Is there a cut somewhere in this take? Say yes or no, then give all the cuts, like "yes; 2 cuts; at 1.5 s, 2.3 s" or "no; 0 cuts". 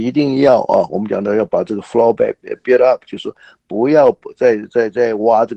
no; 0 cuts